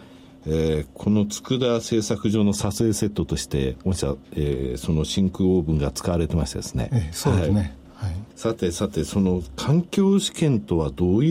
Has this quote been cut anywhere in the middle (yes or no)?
yes